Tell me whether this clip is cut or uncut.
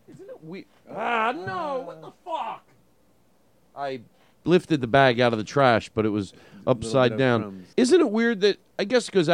cut